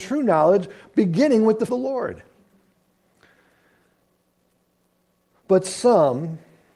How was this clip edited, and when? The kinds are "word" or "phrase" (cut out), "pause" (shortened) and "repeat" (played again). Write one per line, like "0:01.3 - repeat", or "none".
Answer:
0:01.7 - phrase